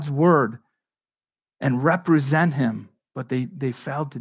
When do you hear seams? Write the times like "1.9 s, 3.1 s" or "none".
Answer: none